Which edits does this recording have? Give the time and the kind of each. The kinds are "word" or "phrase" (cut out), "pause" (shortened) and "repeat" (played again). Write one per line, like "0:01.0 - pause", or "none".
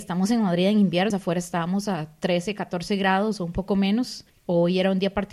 0:01.1 - word